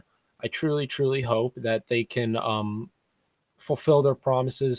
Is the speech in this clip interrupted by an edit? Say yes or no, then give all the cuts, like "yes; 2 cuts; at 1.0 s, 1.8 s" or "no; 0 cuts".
no; 0 cuts